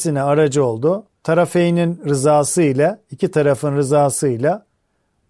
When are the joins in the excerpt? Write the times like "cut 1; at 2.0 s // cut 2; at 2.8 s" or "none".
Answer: cut 1; at 1.2 s

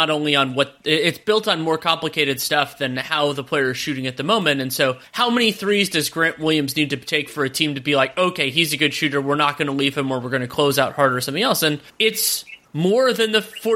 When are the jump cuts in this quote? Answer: none

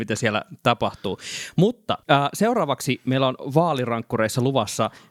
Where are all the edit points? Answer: cut 1; at 2.0 s

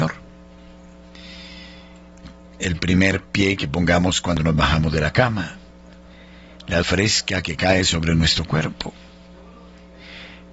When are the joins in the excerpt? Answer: cut 1; at 6.8 s

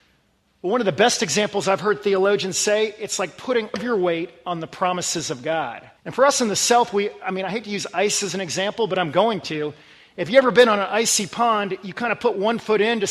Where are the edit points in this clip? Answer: cut 1; at 3.7 s // cut 2; at 6.0 s

